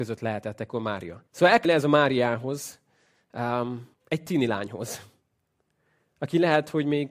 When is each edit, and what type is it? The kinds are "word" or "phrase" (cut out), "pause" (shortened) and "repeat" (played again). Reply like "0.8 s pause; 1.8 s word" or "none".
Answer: 1.3 s pause; 1.6 s word; 3.9 s pause